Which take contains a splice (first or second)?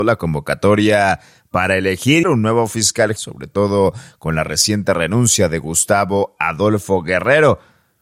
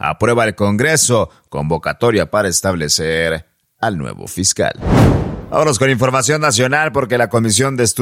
first